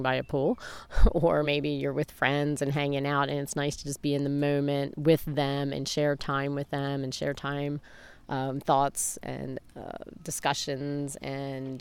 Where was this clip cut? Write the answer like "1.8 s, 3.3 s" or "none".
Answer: none